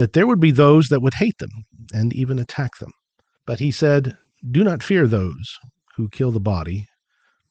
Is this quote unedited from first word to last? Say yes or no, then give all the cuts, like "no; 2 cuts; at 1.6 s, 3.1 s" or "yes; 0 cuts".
yes; 0 cuts